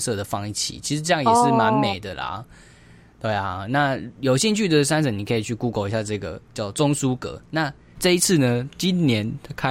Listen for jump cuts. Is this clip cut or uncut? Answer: uncut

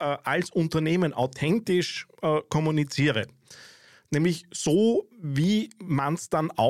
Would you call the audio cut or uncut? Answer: uncut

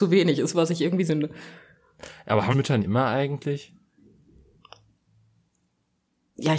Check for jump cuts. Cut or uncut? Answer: cut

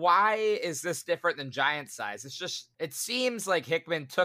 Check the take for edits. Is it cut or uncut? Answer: cut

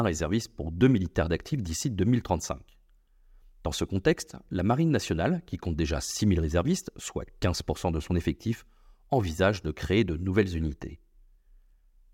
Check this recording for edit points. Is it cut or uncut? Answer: uncut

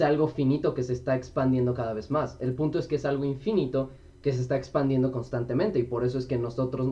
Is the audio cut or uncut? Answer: uncut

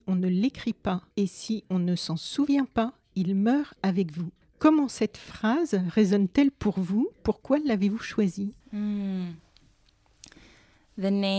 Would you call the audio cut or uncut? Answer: cut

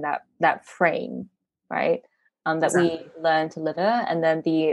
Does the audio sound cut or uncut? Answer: cut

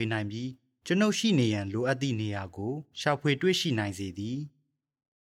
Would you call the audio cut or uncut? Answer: uncut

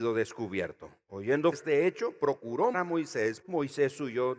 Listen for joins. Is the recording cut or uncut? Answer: cut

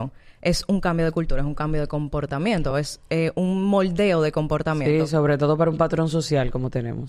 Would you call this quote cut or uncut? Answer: uncut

